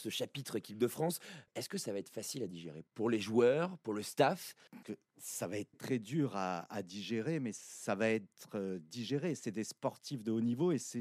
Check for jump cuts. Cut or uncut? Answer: cut